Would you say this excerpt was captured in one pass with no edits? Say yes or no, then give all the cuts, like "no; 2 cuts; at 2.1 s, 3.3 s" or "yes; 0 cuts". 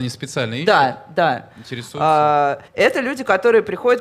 no; 1 cut; at 2.7 s